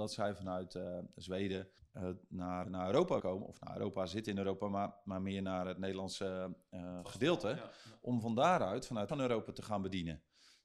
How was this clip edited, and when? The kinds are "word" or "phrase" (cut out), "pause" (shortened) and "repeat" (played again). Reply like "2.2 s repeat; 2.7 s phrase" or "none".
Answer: 1.8 s pause; 2.6 s word; 3.2 s word; 9.1 s phrase